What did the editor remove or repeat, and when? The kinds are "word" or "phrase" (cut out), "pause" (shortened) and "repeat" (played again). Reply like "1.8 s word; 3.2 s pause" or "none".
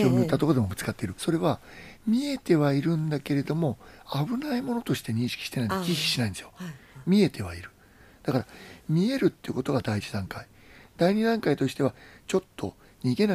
1.2 s phrase